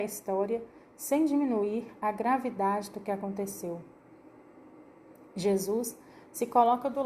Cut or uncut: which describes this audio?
uncut